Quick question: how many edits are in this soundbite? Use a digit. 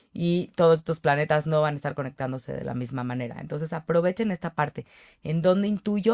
0